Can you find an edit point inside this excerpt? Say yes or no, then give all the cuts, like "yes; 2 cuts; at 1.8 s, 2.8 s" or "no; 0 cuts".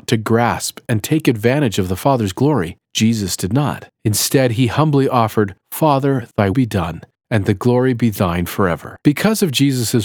yes; 5 cuts; at 2.8 s, 4.0 s, 5.6 s, 6.5 s, 9.0 s